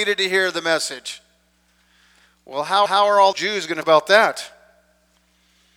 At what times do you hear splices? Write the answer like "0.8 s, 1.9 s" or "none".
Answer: 2.9 s, 3.3 s, 3.8 s

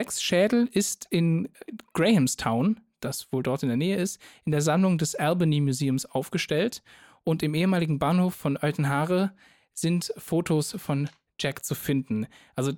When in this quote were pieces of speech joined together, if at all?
none

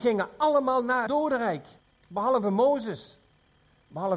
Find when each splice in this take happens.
1.1 s, 1.8 s

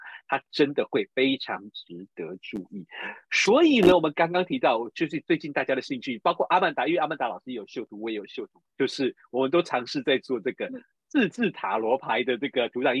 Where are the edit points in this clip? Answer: 8.7 s, 10.9 s

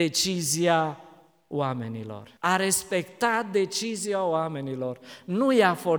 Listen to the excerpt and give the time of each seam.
2.4 s

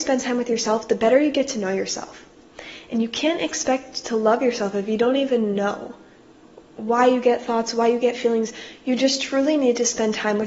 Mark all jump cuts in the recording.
none

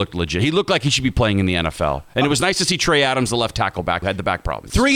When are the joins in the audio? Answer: 4.0 s

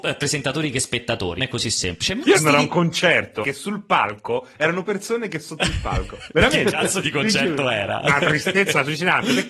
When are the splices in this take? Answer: 1.4 s, 2.3 s, 3.4 s, 4.8 s, 7.0 s

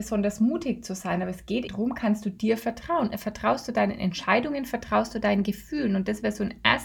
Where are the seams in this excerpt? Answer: 1.7 s

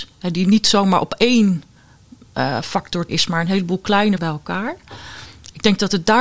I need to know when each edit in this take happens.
3.1 s, 4.2 s

